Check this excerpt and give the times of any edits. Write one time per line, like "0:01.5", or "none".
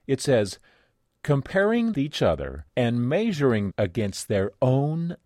0:01.9
0:02.7
0:03.7